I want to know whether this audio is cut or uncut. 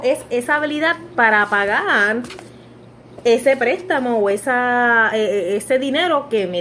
uncut